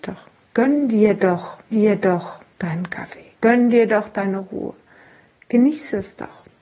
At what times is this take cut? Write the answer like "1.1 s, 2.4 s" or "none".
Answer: 1.7 s